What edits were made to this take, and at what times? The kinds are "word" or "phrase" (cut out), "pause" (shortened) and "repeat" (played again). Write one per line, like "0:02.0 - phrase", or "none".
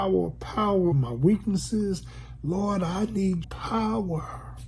0:00.9 - word
0:03.4 - word